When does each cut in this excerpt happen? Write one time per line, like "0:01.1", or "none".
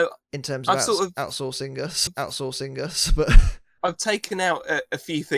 0:02.1
0:03.8